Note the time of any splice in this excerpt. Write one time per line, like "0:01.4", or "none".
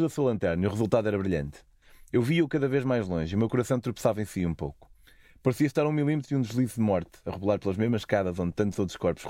none